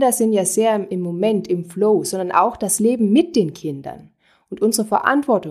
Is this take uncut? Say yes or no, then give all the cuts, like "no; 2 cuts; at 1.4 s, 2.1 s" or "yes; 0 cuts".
yes; 0 cuts